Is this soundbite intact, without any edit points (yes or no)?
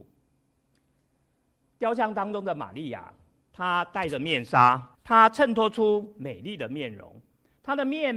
no